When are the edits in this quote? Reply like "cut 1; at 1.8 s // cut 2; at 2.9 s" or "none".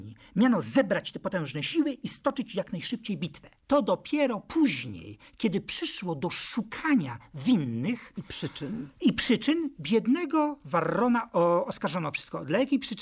cut 1; at 3.6 s